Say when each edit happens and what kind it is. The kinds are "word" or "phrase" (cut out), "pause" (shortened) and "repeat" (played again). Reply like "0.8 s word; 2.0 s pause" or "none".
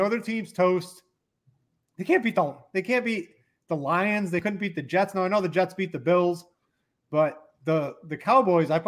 none

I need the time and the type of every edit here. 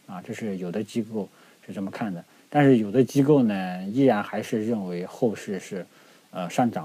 none

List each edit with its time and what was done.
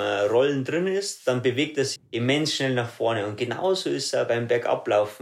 2.0 s word

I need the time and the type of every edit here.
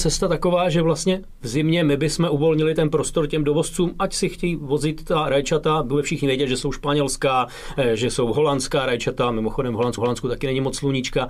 10.0 s repeat

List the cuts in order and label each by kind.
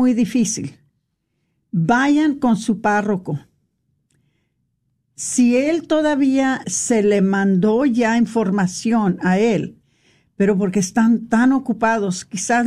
6.6 s phrase

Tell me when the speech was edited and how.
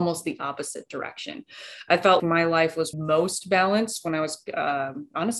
2.2 s word; 2.9 s word

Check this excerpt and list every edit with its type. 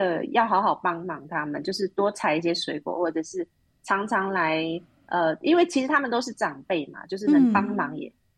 none

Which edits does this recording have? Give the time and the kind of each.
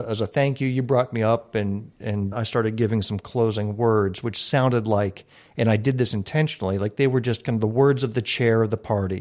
2.3 s word

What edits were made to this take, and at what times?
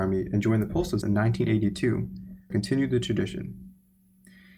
1.0 s word; 2.5 s word

